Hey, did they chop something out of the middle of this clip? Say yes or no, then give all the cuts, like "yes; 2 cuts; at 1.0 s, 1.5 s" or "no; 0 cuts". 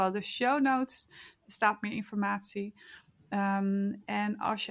no; 0 cuts